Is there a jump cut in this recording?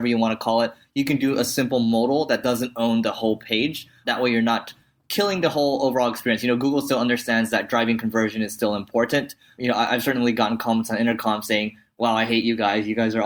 no; 0 cuts

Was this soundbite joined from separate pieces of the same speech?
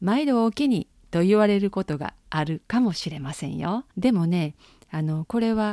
yes; 2 cuts; at 0.9 s, 3.9 s

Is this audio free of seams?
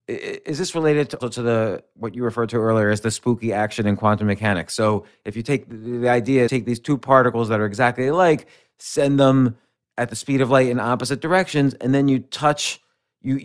no; 2 cuts; at 1.2 s, 6.5 s

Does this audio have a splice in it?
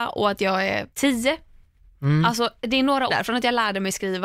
yes; 2 cuts; at 0.9 s, 3.1 s

